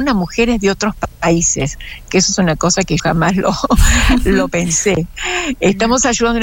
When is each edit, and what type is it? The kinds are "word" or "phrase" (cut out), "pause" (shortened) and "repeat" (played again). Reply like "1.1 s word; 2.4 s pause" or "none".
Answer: 3.0 s word